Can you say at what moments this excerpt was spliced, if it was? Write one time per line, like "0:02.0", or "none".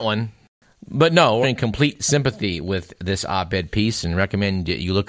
0:01.4